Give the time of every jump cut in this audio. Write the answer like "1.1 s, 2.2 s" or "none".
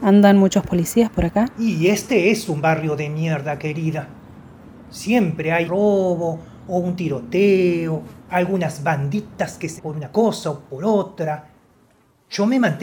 1.5 s, 5.6 s, 8.2 s, 9.8 s